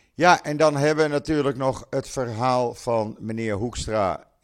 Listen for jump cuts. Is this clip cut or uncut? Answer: uncut